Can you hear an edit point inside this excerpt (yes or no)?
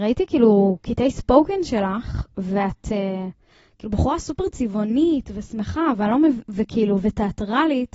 no